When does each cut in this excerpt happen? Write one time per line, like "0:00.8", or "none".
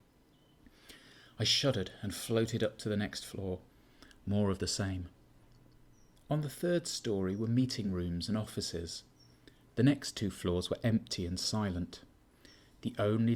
none